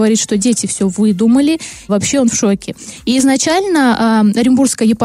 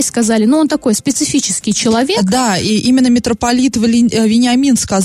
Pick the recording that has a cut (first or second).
first